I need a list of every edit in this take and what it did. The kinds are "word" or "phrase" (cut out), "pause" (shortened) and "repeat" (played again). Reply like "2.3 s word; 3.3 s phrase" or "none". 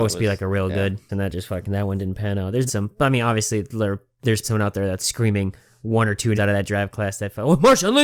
1.1 s word; 2.7 s word; 4.4 s word; 5.0 s word; 6.3 s word